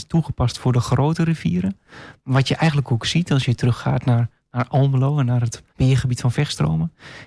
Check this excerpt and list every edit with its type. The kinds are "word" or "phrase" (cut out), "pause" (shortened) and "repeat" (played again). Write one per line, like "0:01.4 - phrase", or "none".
0:05.7 - pause